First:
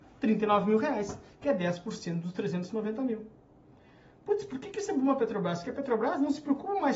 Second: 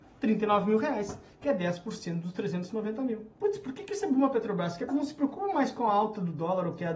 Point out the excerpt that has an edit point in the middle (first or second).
second